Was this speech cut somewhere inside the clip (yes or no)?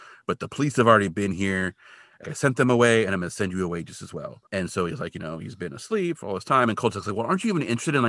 yes